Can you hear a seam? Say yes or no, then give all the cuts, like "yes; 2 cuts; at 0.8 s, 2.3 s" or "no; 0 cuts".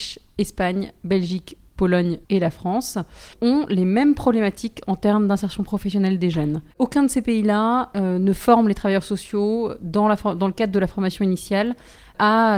yes; 3 cuts; at 2.2 s, 3.3 s, 6.7 s